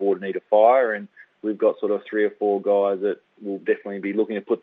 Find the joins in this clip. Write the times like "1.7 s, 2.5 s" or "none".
none